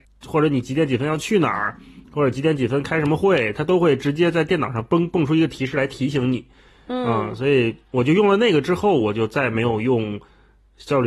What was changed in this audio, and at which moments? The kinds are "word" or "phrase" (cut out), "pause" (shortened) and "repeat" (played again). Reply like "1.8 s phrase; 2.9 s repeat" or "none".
none

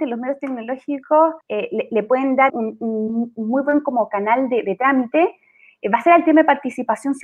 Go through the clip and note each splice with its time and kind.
1.4 s pause; 2.5 s word

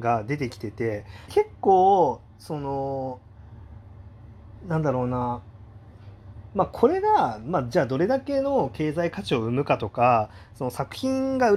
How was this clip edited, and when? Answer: 1.3 s word

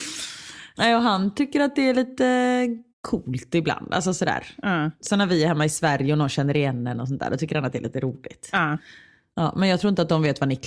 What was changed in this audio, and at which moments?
2.9 s pause

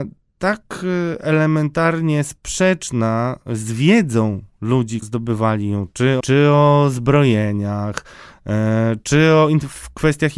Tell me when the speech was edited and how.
5.0 s word; 6.2 s phrase

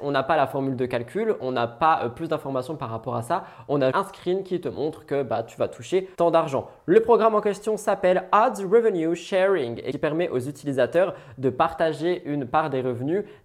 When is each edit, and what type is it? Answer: 3.9 s word; 6.1 s pause

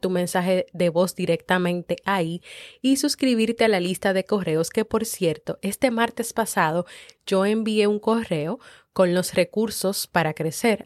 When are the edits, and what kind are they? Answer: none

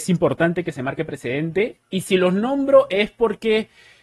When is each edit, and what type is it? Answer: 1.8 s pause

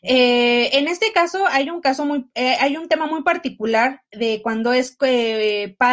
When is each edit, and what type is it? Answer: none

